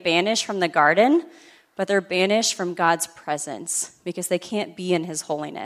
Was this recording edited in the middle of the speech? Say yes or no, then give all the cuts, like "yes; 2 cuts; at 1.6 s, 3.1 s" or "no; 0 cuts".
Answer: no; 0 cuts